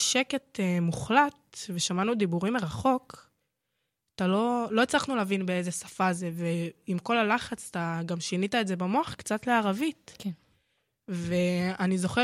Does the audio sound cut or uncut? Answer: uncut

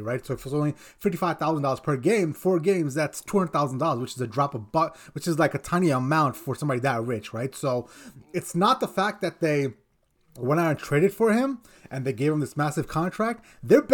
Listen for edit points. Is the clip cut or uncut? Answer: uncut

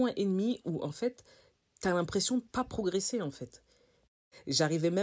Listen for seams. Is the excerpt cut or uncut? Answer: uncut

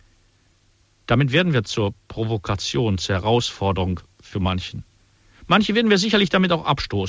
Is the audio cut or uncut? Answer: uncut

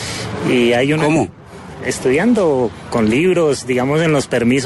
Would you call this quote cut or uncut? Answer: uncut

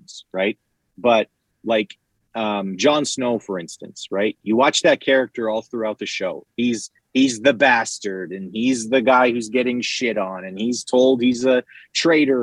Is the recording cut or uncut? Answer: uncut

